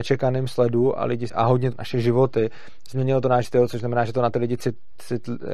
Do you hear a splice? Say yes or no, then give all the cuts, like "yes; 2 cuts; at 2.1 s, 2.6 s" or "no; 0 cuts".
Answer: yes; 3 cuts; at 1.3 s, 1.7 s, 3.4 s